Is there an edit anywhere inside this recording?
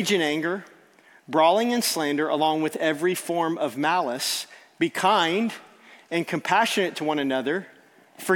no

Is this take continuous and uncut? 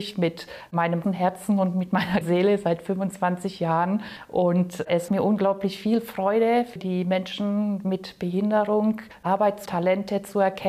no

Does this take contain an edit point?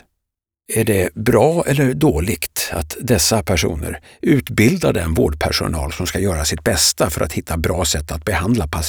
no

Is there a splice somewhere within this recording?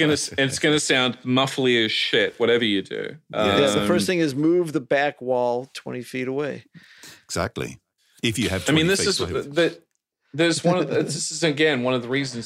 no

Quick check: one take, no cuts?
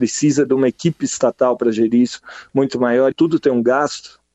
no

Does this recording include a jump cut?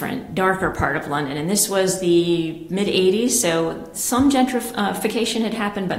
no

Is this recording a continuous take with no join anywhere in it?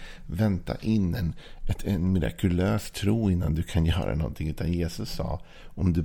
yes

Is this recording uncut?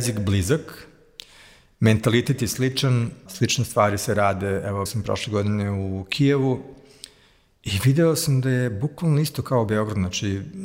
no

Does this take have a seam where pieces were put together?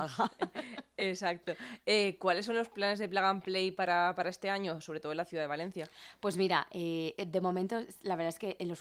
yes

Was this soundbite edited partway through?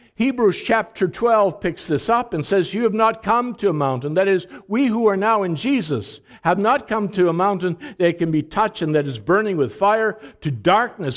no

